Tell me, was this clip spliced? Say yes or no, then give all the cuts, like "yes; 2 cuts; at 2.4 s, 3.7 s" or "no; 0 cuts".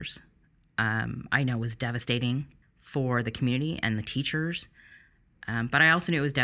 yes; 1 cut; at 2.6 s